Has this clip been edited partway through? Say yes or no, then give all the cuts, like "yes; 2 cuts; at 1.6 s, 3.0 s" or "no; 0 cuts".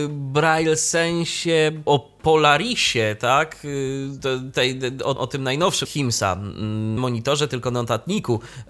yes; 4 cuts; at 1.9 s, 5.2 s, 5.8 s, 7.0 s